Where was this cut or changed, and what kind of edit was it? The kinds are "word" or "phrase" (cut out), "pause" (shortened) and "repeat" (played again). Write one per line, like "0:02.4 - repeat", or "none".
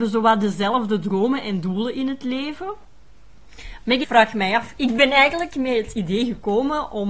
0:04.0 - word